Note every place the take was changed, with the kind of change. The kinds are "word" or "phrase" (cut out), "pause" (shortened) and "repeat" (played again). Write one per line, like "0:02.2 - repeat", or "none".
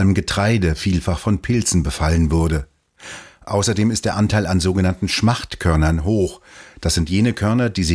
none